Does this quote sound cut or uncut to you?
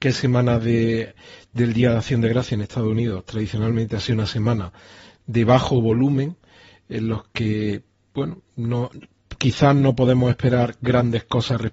uncut